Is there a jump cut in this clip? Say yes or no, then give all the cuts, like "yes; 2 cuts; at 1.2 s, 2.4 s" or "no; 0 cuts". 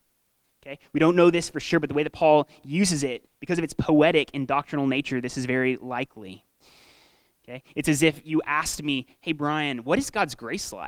no; 0 cuts